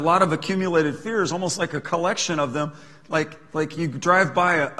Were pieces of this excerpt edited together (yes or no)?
no